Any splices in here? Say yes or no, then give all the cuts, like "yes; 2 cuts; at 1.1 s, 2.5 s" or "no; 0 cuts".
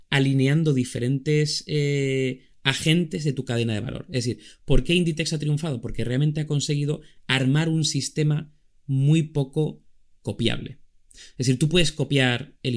no; 0 cuts